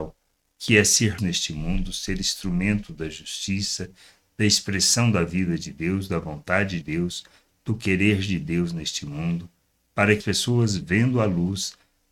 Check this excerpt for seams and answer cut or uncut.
cut